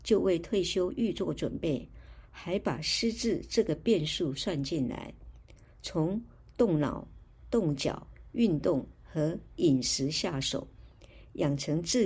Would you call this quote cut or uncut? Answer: uncut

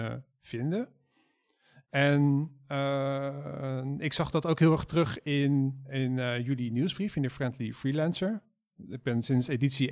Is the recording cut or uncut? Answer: uncut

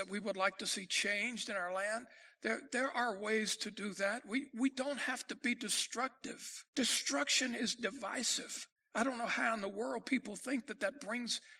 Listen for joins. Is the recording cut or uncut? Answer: cut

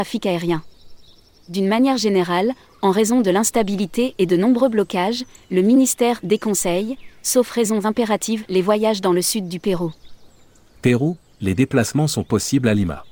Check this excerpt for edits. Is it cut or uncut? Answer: uncut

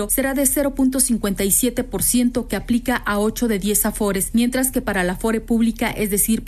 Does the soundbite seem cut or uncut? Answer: uncut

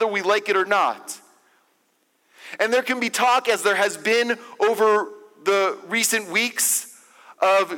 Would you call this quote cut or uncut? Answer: uncut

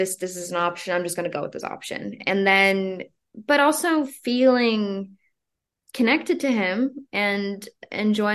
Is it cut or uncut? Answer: uncut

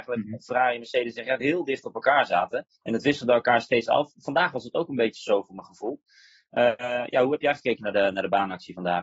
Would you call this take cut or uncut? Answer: cut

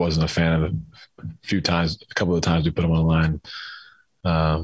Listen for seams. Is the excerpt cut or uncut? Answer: uncut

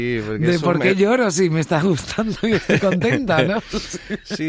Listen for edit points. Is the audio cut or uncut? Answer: uncut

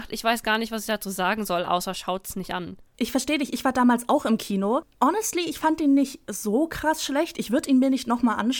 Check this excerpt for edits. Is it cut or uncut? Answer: cut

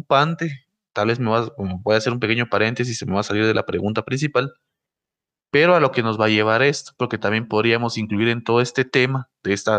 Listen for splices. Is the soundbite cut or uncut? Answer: uncut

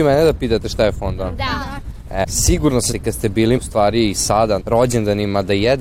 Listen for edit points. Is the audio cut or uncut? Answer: cut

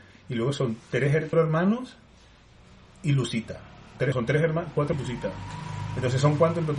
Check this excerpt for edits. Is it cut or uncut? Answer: cut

